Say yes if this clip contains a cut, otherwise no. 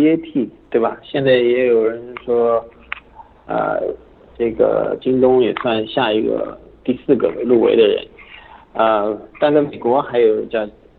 no